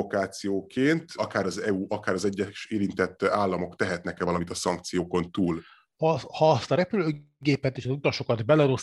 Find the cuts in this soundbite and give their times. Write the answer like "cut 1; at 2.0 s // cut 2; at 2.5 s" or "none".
none